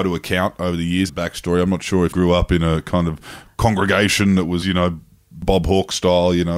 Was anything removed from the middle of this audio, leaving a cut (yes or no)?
yes